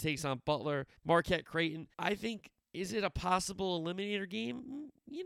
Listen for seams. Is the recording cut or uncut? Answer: cut